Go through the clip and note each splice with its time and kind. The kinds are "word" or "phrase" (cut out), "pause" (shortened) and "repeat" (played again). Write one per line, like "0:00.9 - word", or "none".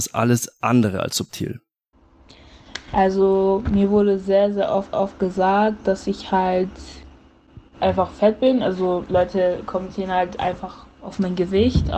0:04.9 - repeat
0:07.7 - pause

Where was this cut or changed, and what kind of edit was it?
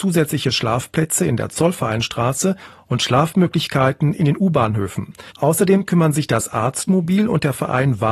0:05.3 - pause

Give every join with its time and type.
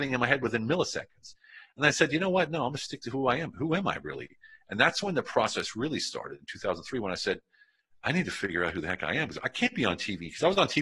none

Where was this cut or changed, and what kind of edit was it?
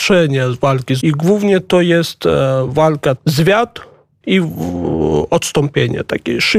0:01.0 - word
0:03.2 - word
0:04.2 - word

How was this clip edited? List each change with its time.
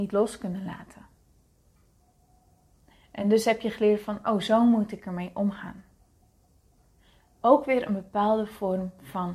none

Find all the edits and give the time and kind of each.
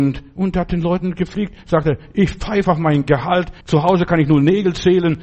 0:03.6 - pause

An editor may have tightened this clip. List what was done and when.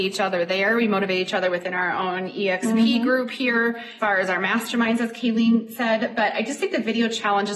0:04.0 - word

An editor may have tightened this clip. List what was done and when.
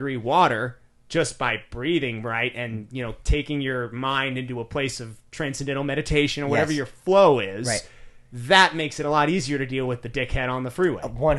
0:08.2 - pause

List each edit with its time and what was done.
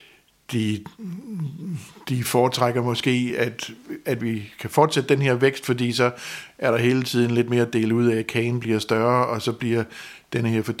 none

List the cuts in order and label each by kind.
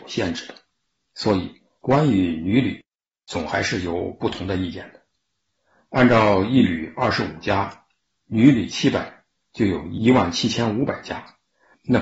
none

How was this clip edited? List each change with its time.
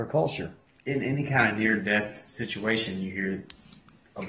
none

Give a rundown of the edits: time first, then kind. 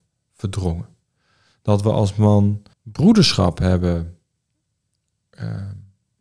0:02.7 - pause

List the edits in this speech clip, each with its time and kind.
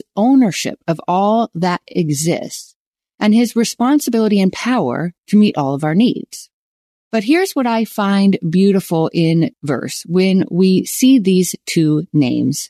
0:05.2 - pause
0:09.5 - word

